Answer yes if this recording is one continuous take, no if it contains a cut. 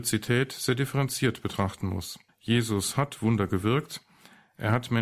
no